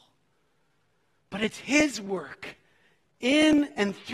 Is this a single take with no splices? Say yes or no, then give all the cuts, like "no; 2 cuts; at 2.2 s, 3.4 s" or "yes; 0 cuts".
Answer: yes; 0 cuts